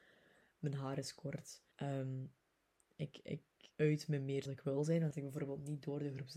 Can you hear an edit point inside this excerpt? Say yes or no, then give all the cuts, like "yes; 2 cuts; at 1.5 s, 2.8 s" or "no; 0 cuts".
yes; 4 cuts; at 1.7 s, 3.7 s, 4.5 s, 5.1 s